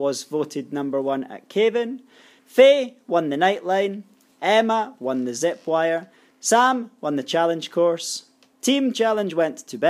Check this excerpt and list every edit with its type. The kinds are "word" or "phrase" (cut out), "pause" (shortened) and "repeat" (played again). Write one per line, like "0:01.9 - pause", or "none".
none